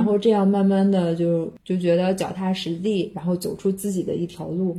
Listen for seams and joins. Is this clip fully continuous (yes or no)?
yes